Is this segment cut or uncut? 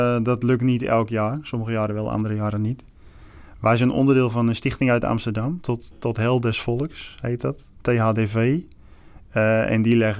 uncut